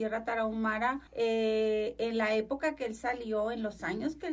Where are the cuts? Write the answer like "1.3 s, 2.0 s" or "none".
1.1 s

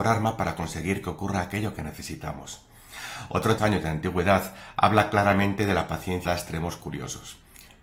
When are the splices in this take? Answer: 3.6 s, 6.2 s

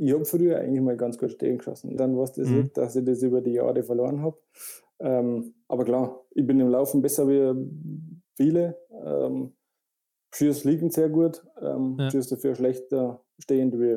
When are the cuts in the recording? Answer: 2.0 s, 8.2 s

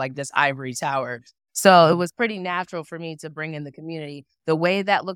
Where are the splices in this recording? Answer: none

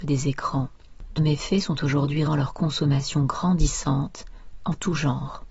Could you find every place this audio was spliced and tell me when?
1.2 s, 2.3 s

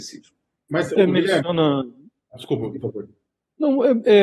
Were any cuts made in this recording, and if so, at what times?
1.0 s, 2.8 s

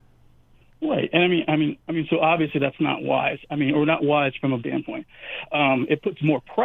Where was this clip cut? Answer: 4.6 s

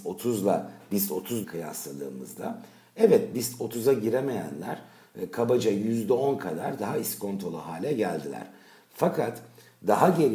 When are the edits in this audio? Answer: 1.4 s

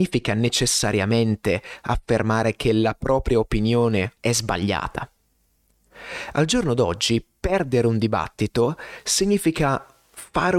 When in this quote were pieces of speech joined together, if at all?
4.2 s

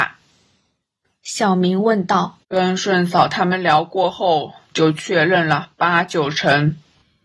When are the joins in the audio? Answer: 2.4 s

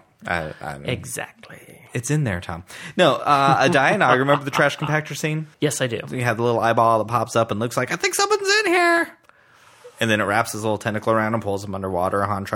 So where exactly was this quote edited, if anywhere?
5.5 s

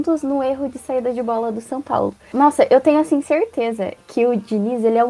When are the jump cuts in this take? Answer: none

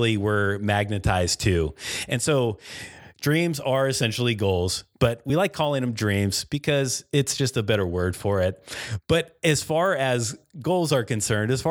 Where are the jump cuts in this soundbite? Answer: none

